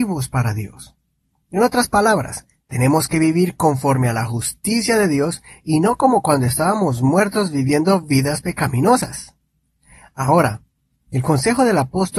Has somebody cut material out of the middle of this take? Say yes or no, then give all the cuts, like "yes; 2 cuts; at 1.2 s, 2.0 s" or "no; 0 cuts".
no; 0 cuts